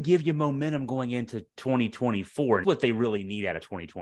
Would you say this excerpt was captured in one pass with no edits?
no; 1 cut; at 2.6 s

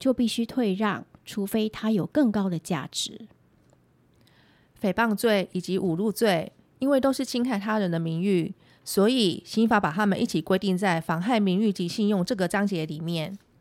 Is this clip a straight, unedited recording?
no; 1 cut; at 1.2 s

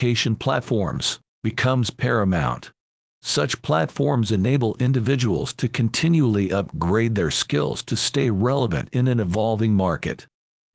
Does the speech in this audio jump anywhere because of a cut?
no; 0 cuts

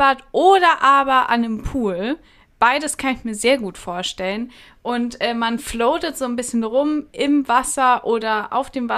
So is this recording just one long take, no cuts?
yes; 0 cuts

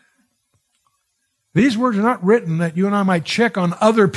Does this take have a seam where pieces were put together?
no; 0 cuts

